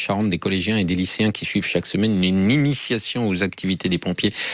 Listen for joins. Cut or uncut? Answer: uncut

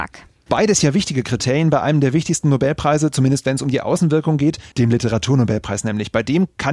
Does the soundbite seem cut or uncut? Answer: cut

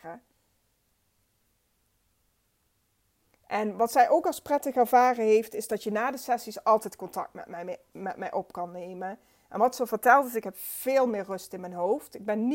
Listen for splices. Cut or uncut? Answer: uncut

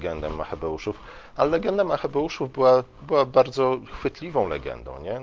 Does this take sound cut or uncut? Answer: uncut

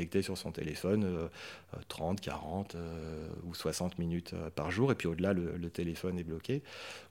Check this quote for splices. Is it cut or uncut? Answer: uncut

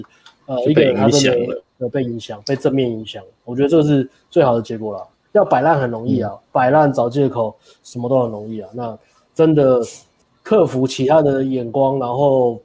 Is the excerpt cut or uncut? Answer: uncut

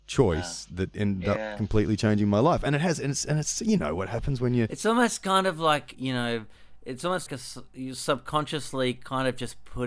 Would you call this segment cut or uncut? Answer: cut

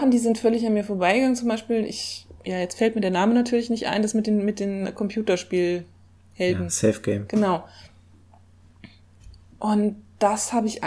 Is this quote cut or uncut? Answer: cut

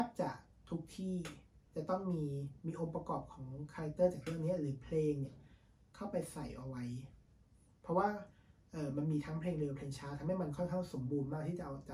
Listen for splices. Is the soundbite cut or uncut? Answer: cut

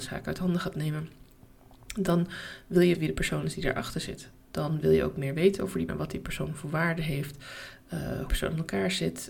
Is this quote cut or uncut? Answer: cut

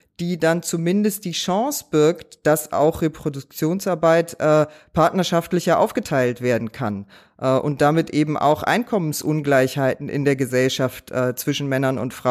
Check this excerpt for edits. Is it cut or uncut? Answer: uncut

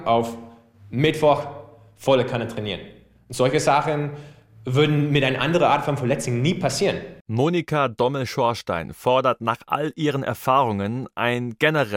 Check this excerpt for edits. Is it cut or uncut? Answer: uncut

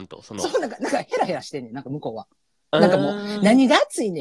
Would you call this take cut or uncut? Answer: uncut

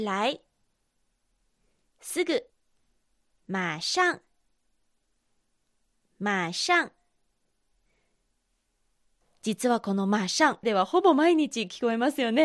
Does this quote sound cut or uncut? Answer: cut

